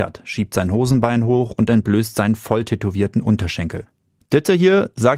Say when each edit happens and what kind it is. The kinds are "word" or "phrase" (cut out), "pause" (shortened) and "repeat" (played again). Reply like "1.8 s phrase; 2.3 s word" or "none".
none